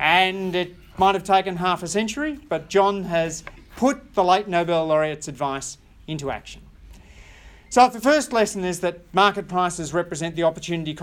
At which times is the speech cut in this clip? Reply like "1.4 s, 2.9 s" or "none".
none